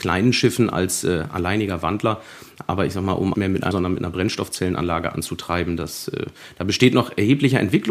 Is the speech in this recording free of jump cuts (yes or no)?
no